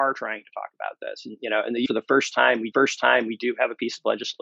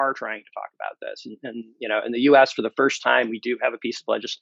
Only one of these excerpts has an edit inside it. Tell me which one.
first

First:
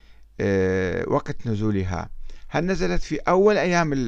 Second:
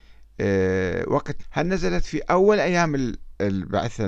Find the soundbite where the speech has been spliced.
second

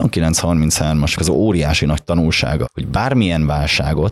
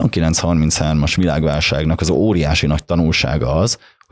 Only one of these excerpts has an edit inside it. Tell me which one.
first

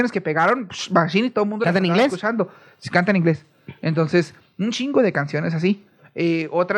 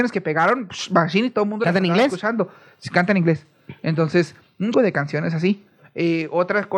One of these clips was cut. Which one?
second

